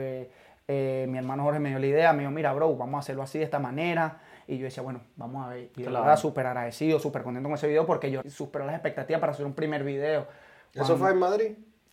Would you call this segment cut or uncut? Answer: cut